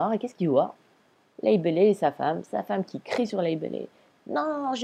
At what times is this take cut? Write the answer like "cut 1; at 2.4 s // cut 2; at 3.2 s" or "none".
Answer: none